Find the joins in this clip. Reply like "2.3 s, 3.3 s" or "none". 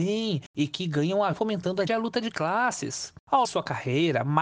1.3 s, 1.9 s, 3.4 s